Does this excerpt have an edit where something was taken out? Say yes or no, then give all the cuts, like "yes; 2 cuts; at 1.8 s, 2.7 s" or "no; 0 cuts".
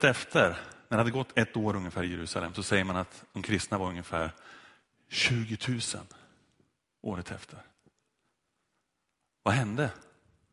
no; 0 cuts